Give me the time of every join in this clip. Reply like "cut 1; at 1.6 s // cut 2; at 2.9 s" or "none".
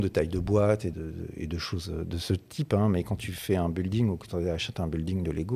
cut 1; at 0.9 s